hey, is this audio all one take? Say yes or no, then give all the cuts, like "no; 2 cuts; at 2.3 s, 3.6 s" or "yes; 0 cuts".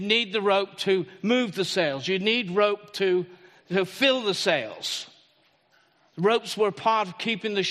yes; 0 cuts